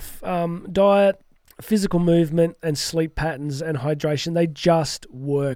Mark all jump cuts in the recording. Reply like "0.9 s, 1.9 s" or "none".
1.4 s